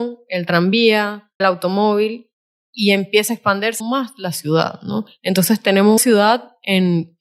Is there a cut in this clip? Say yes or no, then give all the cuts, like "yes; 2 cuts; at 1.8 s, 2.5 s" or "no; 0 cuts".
yes; 3 cuts; at 1.4 s, 3.8 s, 6.0 s